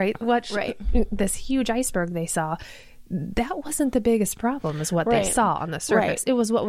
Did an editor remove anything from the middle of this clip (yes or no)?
no